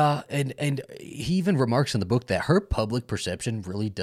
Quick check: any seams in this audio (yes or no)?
no